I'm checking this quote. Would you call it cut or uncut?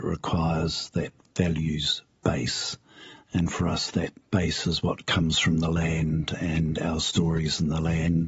uncut